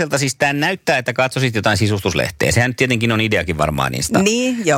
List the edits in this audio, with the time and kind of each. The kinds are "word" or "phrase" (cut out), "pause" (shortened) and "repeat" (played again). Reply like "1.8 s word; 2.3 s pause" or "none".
none